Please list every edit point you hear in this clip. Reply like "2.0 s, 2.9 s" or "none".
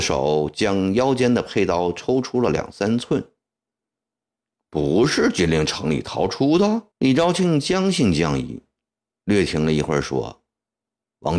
6.9 s